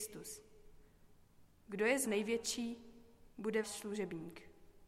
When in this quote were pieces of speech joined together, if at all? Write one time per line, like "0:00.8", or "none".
0:02.0
0:03.6